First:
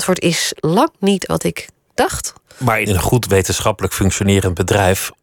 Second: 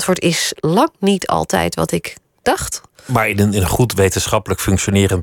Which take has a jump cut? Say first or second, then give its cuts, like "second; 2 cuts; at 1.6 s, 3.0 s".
first; 2 cuts; at 1.3 s, 2.9 s